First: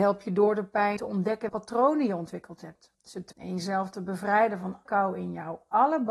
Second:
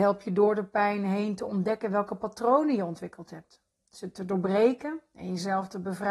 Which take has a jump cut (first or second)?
first